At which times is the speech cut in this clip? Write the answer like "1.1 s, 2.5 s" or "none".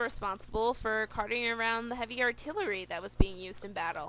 none